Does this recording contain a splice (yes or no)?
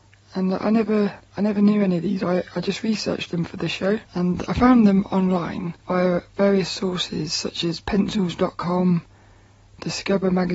yes